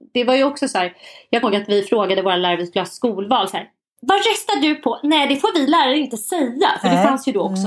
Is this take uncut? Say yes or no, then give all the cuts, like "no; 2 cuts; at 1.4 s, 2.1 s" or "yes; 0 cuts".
no; 1 cut; at 1.4 s